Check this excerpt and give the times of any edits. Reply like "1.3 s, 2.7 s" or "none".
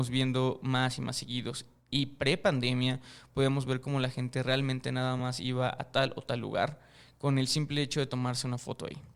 none